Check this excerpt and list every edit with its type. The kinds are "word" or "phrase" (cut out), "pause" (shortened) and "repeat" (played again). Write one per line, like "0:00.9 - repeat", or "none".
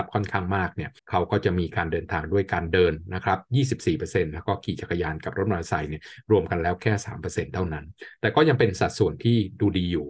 0:01.0 - pause